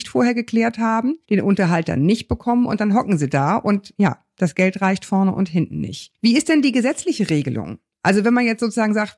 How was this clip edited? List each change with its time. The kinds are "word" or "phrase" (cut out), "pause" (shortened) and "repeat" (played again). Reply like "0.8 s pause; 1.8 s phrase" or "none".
1.2 s pause